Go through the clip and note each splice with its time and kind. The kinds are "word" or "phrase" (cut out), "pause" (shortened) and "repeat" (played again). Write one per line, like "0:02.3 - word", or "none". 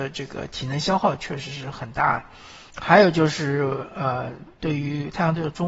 0:02.7 - pause
0:04.5 - pause